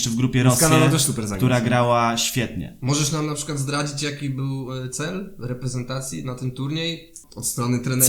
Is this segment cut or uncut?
uncut